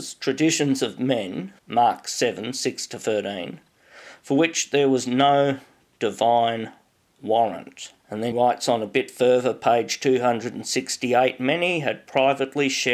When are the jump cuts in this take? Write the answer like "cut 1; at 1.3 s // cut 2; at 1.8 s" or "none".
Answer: cut 1; at 1.6 s // cut 2; at 8.0 s // cut 3; at 8.3 s